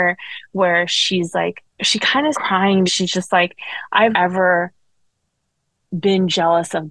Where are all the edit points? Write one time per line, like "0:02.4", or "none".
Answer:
0:01.7
0:02.3
0:02.9
0:04.1